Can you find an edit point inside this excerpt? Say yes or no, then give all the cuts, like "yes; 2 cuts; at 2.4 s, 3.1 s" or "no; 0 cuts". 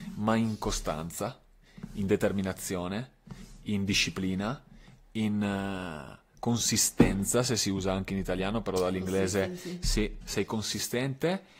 yes; 1 cut; at 10.2 s